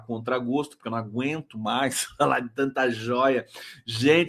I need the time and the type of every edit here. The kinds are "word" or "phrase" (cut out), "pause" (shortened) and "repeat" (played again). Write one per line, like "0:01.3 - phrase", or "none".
none